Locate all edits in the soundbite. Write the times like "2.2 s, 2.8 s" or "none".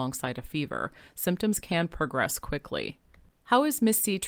none